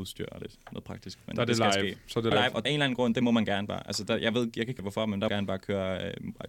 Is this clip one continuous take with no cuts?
no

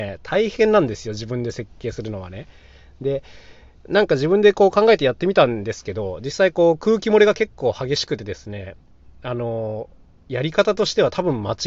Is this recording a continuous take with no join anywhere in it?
yes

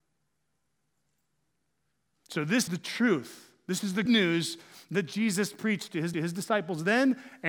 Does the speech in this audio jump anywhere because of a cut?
yes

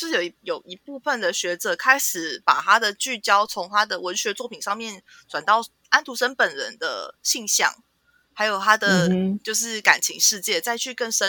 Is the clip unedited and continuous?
yes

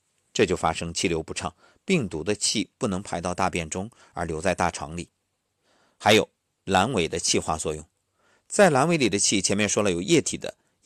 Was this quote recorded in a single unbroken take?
yes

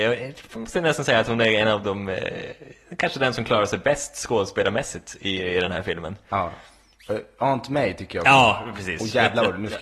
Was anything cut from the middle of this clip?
no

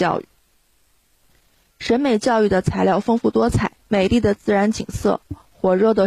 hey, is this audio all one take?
no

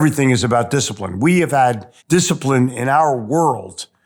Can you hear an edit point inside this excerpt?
yes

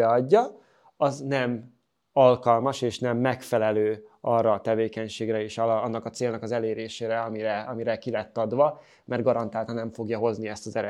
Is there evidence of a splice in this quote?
no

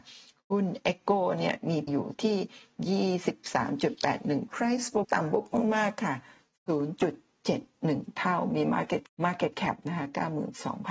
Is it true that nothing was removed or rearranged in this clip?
no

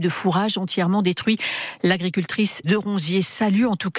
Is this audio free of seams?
no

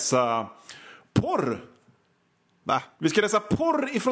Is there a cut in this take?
no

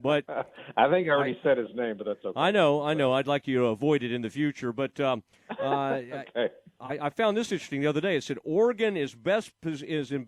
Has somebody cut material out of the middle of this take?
no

